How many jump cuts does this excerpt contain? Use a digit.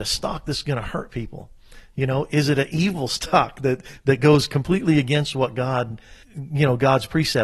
1